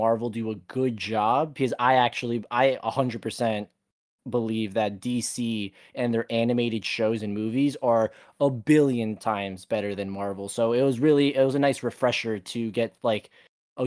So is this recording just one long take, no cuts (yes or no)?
yes